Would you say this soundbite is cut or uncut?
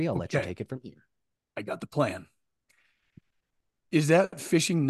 uncut